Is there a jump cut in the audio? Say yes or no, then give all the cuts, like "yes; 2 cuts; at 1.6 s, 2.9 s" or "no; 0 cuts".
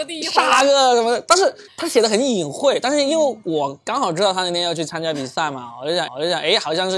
yes; 1 cut; at 6.1 s